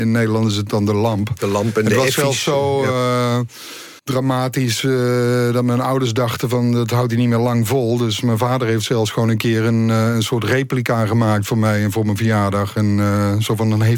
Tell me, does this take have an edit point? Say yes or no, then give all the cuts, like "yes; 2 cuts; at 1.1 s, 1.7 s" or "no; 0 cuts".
yes; 1 cut; at 4.0 s